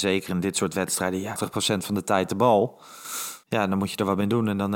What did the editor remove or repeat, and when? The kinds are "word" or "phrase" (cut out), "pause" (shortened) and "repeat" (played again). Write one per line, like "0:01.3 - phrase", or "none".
0:01.4 - phrase
0:03.4 - pause